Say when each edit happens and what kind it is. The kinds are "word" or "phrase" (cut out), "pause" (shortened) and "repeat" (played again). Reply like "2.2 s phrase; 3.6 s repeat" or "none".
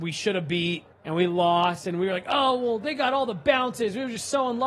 0.9 s pause